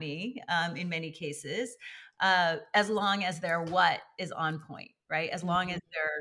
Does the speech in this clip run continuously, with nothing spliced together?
yes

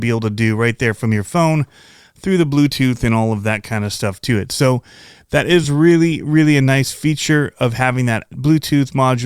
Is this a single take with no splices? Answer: yes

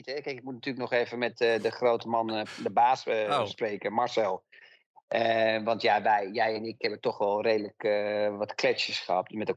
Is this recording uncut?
yes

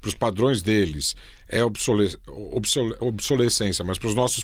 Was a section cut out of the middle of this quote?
no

